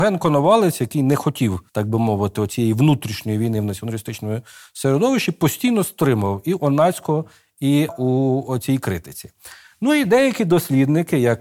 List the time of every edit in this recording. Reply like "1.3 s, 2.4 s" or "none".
1.7 s, 7.9 s